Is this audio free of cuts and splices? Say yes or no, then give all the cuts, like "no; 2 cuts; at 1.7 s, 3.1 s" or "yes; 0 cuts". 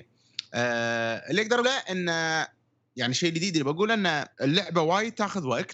no; 2 cuts; at 1.6 s, 4.3 s